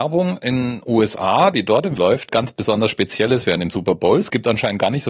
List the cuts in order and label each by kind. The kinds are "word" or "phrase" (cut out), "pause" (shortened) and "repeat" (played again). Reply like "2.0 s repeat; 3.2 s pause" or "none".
2.0 s word; 2.3 s word